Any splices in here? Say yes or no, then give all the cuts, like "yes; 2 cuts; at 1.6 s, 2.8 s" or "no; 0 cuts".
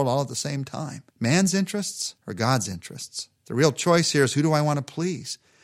yes; 3 cuts; at 1.1 s, 2.2 s, 3.4 s